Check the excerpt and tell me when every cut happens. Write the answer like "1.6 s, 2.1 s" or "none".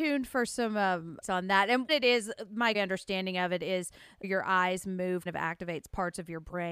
1.2 s, 1.9 s, 2.7 s, 4.2 s, 5.3 s